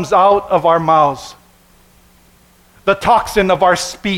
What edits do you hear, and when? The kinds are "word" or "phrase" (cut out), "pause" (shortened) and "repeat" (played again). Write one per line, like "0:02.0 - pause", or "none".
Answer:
none